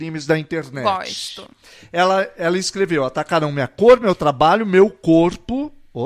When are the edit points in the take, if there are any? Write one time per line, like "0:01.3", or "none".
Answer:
none

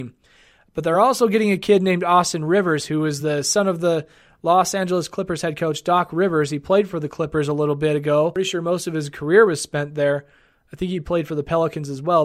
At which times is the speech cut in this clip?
none

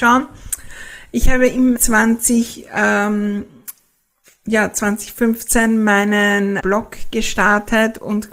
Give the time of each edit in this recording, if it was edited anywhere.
0:01.8
0:06.6

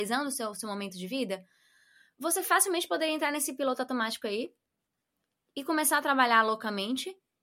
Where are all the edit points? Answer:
none

